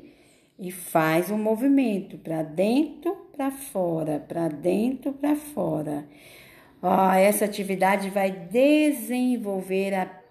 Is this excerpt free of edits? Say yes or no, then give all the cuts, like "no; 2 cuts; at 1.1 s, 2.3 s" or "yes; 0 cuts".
yes; 0 cuts